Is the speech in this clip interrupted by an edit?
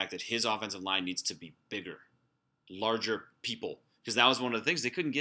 no; 0 cuts

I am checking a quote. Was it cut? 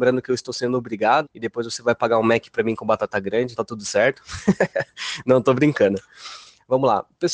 yes; 2 cuts; at 1.2 s, 3.6 s

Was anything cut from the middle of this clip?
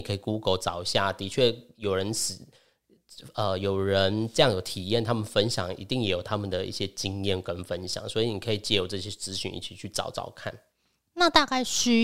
no; 0 cuts

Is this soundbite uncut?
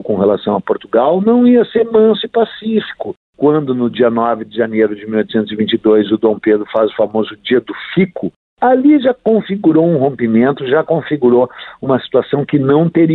yes; 0 cuts

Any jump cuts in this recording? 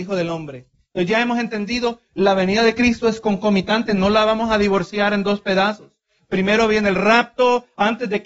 no; 0 cuts

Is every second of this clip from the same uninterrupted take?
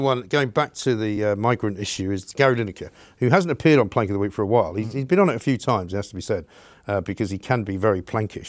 yes; 0 cuts

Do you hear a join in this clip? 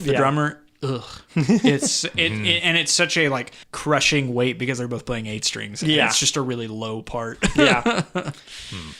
yes; 1 cut; at 3.6 s

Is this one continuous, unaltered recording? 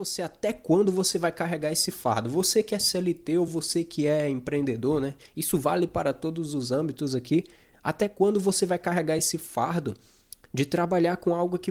yes; 0 cuts

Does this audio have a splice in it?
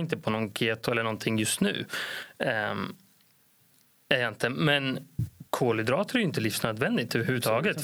yes; 1 cut; at 5.5 s

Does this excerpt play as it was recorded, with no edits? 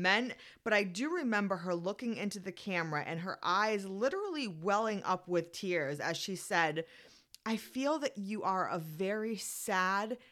yes; 0 cuts

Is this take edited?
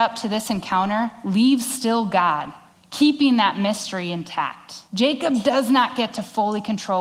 yes; 2 cuts; at 2.7 s, 4.9 s

